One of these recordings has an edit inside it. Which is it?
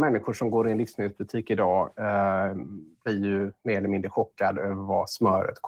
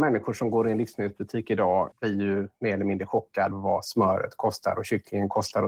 second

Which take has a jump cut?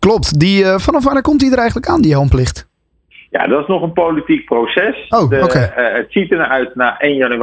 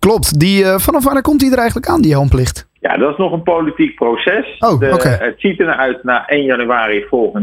second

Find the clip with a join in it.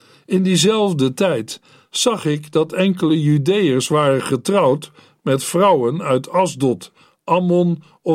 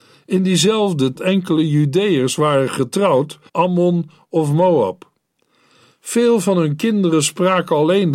second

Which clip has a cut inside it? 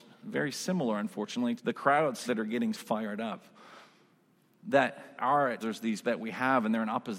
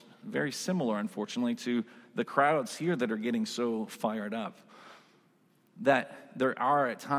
first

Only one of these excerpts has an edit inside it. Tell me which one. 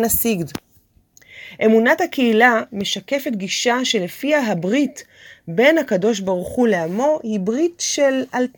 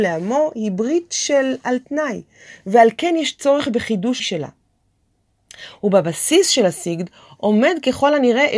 second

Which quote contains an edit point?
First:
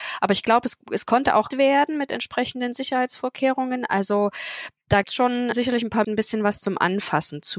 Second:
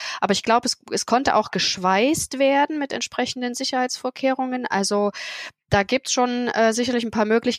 first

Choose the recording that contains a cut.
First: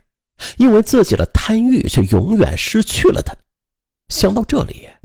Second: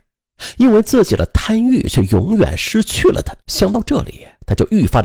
second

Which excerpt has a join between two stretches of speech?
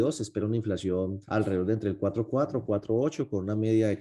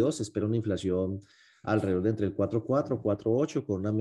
first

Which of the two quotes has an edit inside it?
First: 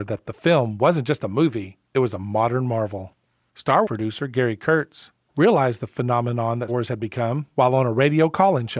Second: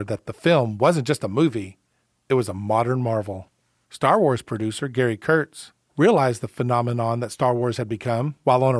first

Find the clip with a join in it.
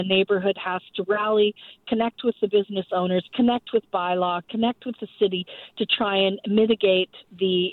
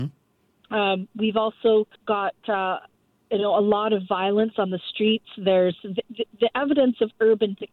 second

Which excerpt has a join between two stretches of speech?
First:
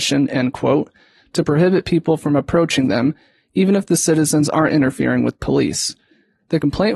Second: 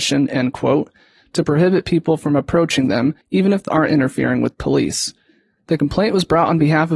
second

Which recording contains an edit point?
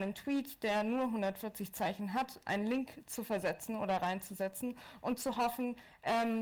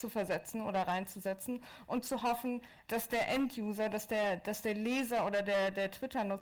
second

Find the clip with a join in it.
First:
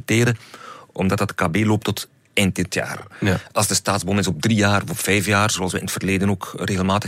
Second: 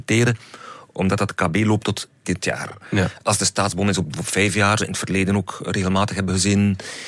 second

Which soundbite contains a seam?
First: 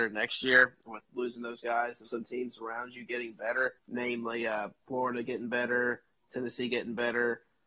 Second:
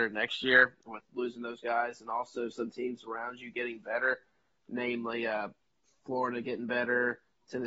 first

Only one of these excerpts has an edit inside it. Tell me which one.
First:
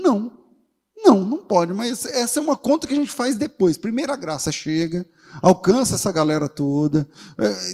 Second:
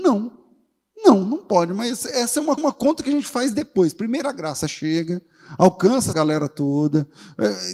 second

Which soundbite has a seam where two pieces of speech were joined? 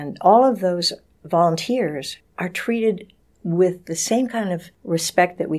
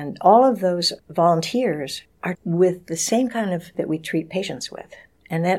second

